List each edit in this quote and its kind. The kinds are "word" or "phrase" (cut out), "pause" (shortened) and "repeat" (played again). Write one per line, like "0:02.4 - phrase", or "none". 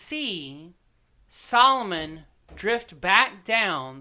0:01.1 - pause